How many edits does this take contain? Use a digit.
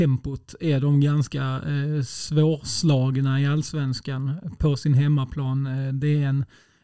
1